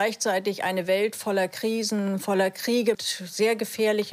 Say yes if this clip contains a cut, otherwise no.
yes